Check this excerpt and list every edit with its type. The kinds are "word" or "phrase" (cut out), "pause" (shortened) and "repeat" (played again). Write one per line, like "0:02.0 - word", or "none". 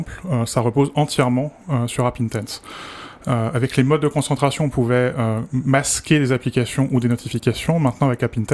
none